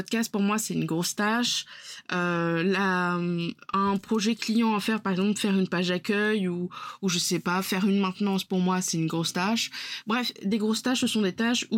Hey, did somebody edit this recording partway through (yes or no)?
no